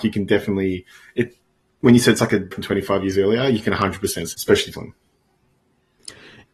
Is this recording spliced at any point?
yes; 3 cuts; at 2.5 s, 4.3 s, 4.7 s

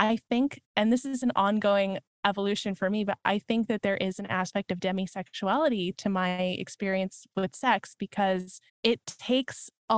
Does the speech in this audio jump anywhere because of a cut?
yes; 1 cut; at 8.7 s

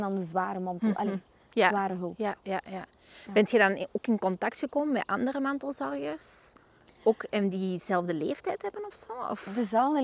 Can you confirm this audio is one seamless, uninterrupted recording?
yes; 0 cuts

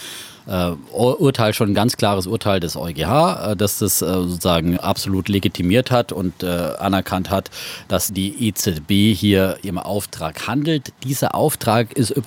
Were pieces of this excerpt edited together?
yes; 3 cuts; at 4.8 s, 8.1 s, 9.6 s

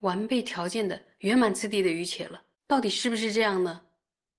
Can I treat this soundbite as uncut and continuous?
no; 1 cut; at 2.5 s

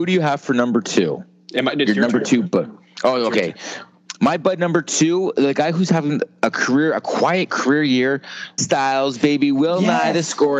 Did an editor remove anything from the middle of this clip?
yes; 1 cut; at 8.6 s

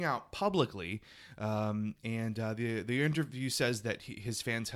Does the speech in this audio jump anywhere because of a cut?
no; 0 cuts

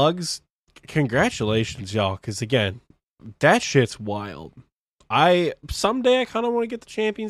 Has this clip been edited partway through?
no; 0 cuts

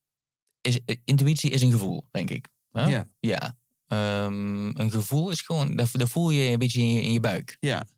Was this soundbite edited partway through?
no; 0 cuts

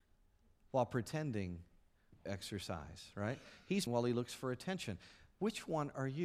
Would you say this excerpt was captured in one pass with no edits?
no; 2 cuts; at 2.3 s, 3.9 s

